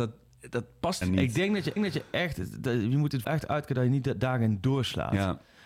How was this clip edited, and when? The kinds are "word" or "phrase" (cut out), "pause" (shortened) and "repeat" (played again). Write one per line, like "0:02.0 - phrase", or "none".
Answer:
0:01.0 - word
0:01.8 - repeat
0:03.2 - word